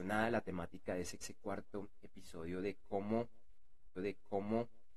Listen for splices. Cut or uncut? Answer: cut